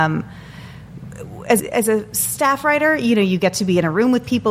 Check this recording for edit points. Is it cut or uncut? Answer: cut